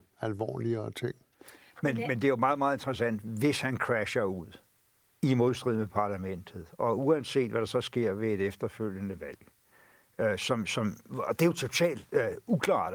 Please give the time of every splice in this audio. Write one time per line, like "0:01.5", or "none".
none